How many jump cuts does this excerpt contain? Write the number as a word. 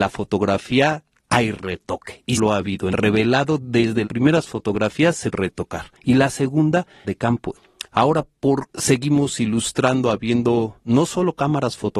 seven